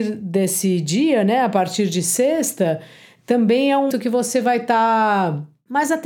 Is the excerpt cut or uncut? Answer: cut